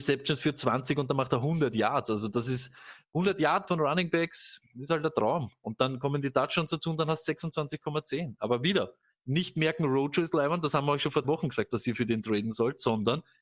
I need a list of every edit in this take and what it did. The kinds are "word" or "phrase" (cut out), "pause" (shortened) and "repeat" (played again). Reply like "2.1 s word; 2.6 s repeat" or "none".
3.7 s word; 11.2 s word

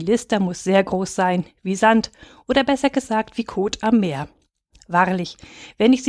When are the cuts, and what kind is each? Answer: none

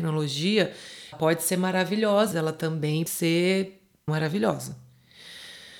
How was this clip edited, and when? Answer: 1.1 s word; 2.3 s word; 3.1 s word; 4.1 s word

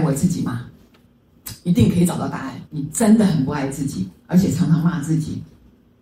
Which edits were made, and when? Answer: 2.7 s pause

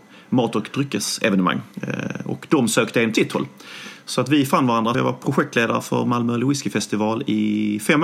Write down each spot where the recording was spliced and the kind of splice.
1.7 s pause; 3.1 s phrase; 4.9 s word

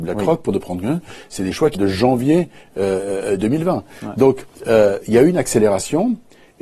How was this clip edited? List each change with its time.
1.7 s word; 4.5 s pause

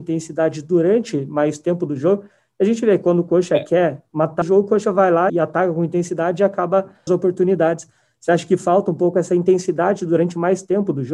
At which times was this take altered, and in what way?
4.4 s word; 5.3 s word; 7.1 s phrase

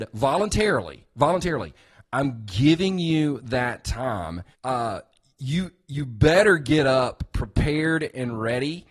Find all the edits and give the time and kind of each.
4.5 s pause

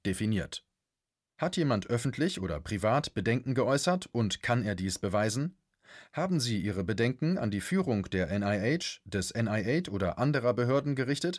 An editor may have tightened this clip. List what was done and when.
none

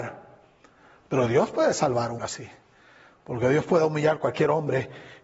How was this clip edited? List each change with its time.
2.2 s word

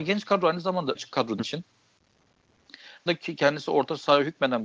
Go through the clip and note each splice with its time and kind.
0.9 s word; 1.4 s phrase; 3.1 s word

